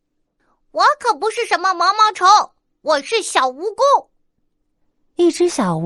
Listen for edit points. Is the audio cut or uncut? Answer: uncut